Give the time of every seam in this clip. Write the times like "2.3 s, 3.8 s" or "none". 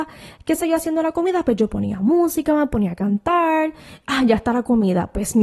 none